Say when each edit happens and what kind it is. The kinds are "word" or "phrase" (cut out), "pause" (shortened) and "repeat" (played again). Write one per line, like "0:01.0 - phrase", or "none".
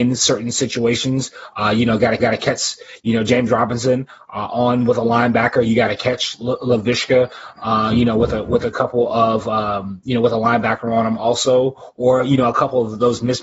0:02.2 - repeat